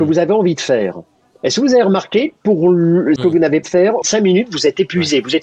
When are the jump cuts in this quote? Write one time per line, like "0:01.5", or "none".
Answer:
0:03.2
0:03.6
0:04.0